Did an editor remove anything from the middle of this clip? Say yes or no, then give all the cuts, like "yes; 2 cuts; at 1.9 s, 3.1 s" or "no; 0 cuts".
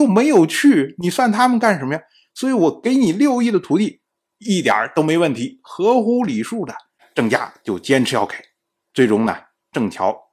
no; 0 cuts